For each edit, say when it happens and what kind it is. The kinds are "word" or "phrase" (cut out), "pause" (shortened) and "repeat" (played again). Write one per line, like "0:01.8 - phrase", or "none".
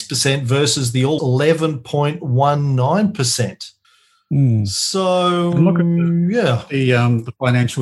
0:01.2 - word
0:03.8 - pause